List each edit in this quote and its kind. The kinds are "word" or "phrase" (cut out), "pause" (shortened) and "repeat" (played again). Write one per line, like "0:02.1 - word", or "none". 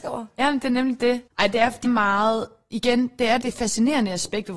0:01.3 - pause
0:01.8 - word
0:03.4 - word